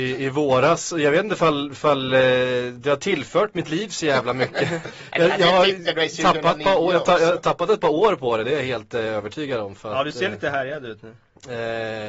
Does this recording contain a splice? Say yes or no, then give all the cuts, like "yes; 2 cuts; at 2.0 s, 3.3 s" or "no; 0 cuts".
no; 0 cuts